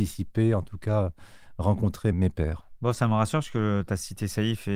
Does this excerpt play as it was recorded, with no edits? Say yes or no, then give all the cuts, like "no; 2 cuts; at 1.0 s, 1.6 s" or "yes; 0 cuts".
no; 1 cut; at 2.1 s